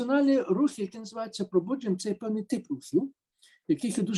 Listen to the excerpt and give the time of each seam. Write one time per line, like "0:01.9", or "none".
0:02.0

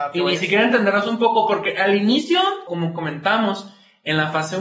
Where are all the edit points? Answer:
0:02.7

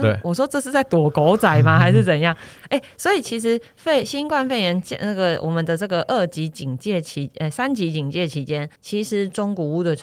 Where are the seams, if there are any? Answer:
0:08.8

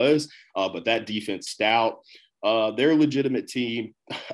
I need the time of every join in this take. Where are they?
0:01.5

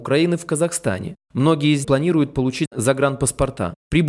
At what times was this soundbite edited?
0:01.8

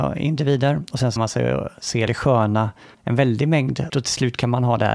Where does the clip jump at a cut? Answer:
0:01.2
0:02.1
0:02.9
0:03.9

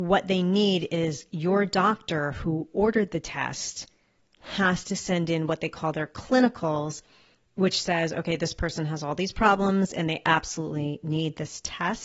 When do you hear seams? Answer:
none

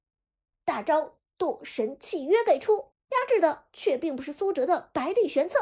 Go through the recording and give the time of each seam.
0:03.0

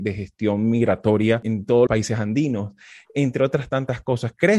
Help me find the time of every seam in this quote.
0:01.9

